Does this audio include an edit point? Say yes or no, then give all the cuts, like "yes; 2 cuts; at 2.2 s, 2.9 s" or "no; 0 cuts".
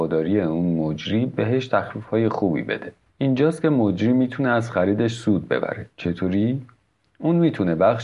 no; 0 cuts